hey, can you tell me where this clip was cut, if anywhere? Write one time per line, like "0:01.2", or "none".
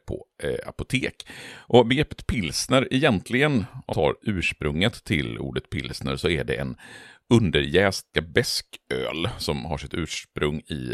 0:03.9
0:08.1